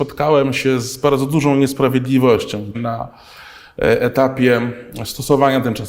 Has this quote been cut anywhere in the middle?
yes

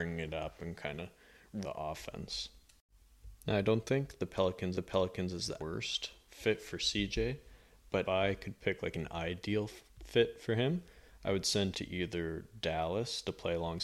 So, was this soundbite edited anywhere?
yes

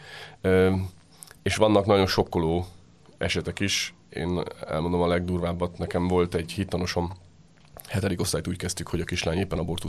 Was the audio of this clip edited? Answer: no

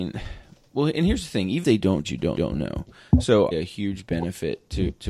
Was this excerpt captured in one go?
no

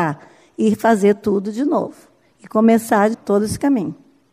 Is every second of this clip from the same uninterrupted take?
no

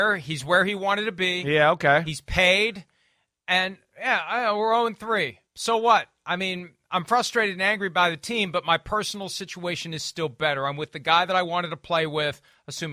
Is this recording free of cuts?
no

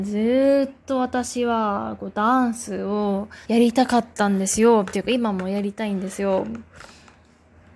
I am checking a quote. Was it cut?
yes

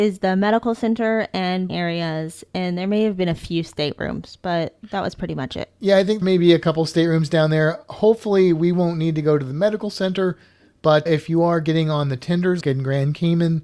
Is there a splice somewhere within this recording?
yes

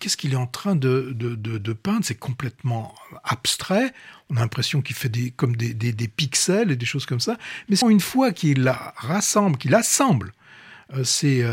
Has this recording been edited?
yes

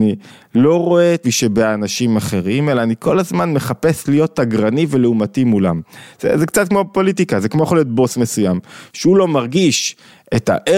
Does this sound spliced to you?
yes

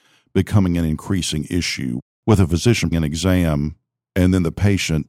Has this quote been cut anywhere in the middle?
yes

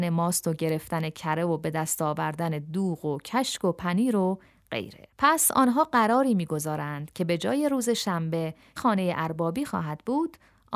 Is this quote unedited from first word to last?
no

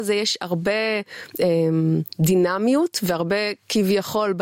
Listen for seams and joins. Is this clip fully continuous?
yes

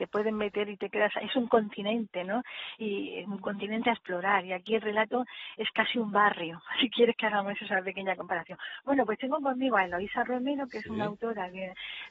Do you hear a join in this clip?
no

